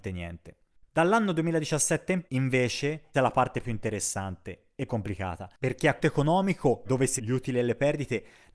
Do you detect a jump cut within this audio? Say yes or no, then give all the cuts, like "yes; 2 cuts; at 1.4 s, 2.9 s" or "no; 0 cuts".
yes; 6 cuts; at 2.3 s, 3.1 s, 4.9 s, 6.0 s, 6.8 s, 7.2 s